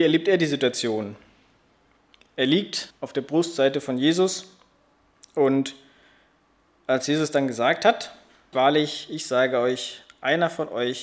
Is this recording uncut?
no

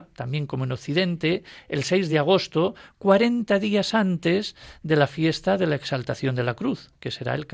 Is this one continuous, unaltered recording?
yes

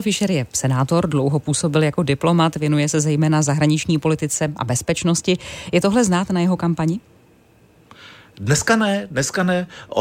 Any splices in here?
no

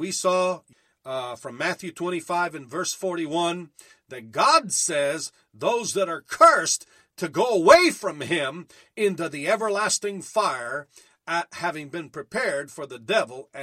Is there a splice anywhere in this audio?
no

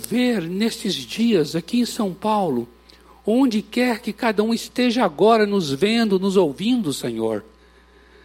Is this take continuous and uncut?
yes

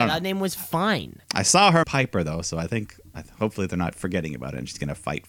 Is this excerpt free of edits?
no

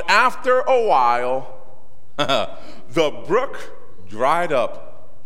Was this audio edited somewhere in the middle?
no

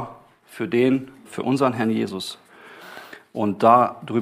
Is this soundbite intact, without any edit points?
no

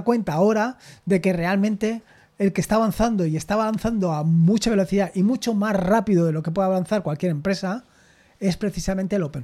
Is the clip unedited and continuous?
yes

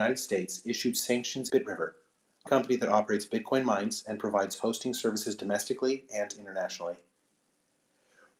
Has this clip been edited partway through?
yes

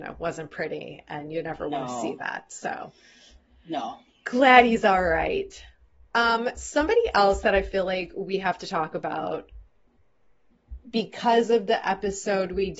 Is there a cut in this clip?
no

